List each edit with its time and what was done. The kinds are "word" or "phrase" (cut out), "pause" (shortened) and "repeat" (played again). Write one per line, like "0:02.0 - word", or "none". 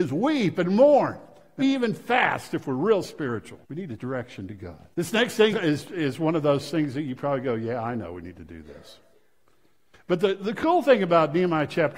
0:01.6 - word
0:03.6 - pause
0:04.0 - word
0:04.9 - pause
0:05.5 - word